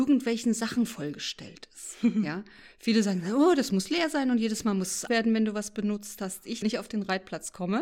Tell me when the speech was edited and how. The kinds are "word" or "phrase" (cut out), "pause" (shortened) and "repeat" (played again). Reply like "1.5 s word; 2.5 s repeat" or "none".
5.1 s word; 6.6 s phrase

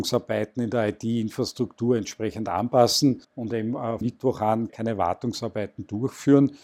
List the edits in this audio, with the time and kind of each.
3.2 s pause; 4.0 s word; 4.7 s word

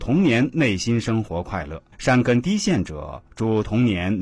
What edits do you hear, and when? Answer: 1.9 s pause

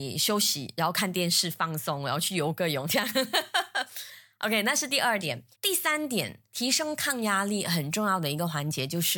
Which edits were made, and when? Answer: 5.5 s pause

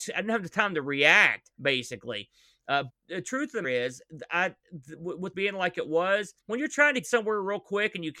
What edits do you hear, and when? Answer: 2.9 s word; 3.6 s word; 5.3 s phrase; 6.4 s pause; 7.0 s word

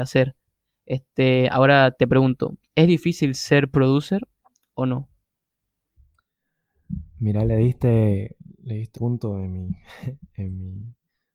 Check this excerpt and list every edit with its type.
8.9 s word

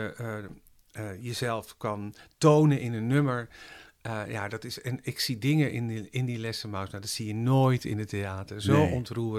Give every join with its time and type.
none

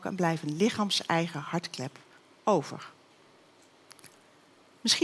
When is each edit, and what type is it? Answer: none

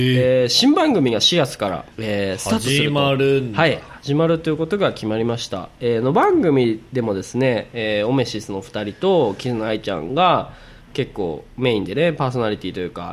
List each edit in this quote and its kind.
1.9 s pause

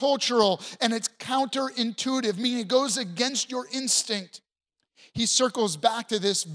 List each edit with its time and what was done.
none

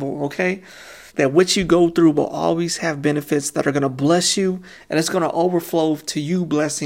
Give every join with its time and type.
1.1 s pause

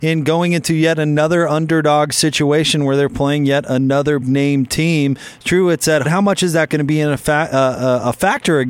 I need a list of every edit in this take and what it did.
4.2 s word; 6.0 s phrase; 6.7 s word

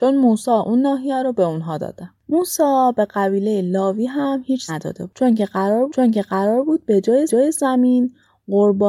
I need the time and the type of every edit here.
2.2 s pause; 4.7 s word; 5.9 s repeat; 7.3 s repeat

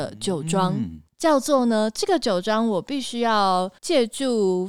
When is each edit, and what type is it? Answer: 1.1 s pause; 3.8 s pause

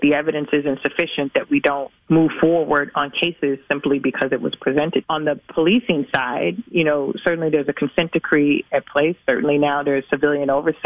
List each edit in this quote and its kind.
5.0 s phrase

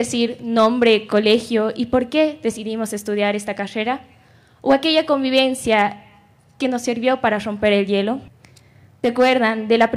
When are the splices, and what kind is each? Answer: none

